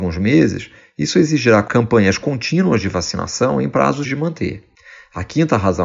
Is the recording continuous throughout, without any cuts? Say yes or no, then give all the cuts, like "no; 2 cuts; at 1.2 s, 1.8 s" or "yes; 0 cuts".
no; 1 cut; at 4.0 s